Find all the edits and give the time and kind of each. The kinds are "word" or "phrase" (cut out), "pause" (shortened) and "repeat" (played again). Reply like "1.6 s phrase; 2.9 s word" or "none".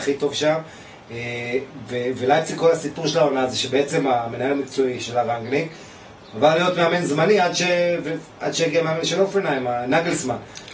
none